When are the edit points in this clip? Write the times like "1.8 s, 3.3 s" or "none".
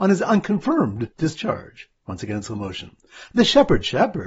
1.1 s